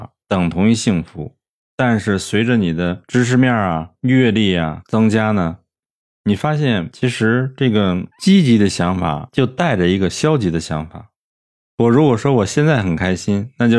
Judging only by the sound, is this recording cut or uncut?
uncut